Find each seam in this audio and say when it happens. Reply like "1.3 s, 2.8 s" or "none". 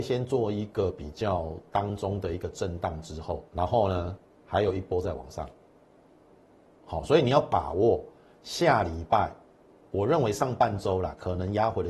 3.5 s